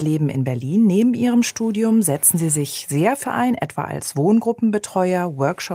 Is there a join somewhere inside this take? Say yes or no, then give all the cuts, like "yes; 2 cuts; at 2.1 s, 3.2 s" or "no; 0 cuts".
yes; 1 cut; at 3.2 s